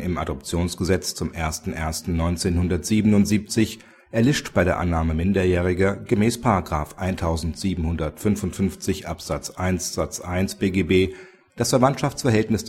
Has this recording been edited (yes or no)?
no